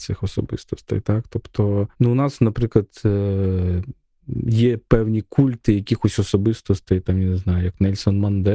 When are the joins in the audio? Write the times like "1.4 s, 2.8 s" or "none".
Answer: 1.9 s